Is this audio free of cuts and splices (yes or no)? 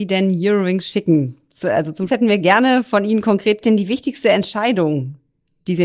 no